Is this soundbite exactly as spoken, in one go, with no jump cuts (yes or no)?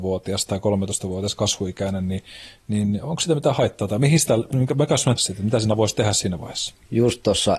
no